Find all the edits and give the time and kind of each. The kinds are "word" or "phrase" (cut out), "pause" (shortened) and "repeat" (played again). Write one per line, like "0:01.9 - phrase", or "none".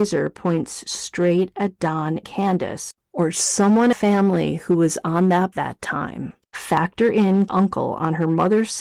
0:02.2 - word
0:03.9 - phrase
0:05.5 - phrase
0:07.5 - word